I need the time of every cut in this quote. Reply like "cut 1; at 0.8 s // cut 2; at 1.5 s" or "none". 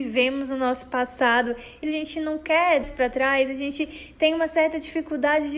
cut 1; at 1.8 s // cut 2; at 2.8 s